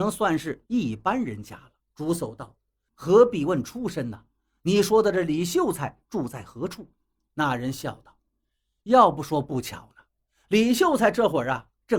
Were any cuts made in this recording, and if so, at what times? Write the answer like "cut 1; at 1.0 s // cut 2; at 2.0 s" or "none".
cut 1; at 1.8 s // cut 2; at 2.9 s